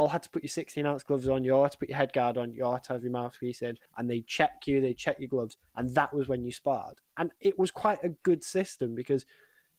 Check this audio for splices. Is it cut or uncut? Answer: cut